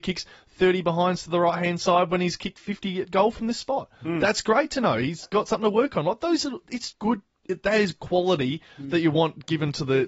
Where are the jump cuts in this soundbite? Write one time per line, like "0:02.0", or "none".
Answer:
0:06.9